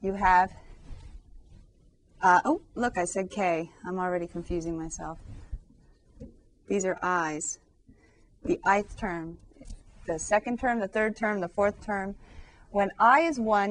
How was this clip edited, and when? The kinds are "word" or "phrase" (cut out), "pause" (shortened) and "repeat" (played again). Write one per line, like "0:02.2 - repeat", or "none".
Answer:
none